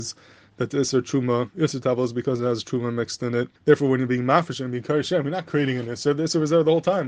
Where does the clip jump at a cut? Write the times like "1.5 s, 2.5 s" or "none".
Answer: 3.6 s